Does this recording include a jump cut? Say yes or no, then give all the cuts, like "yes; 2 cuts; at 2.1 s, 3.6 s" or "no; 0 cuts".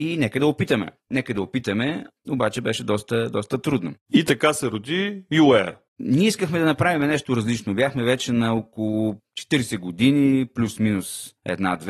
yes; 1 cut; at 4.0 s